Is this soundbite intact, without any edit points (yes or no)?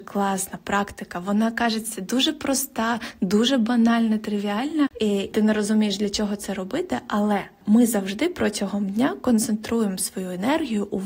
yes